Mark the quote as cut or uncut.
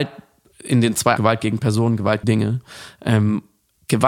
cut